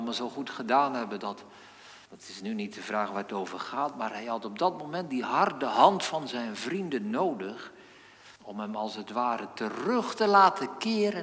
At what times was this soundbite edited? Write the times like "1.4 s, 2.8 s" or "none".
2.1 s, 8.4 s

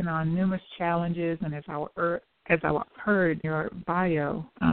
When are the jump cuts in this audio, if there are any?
2.8 s, 3.4 s

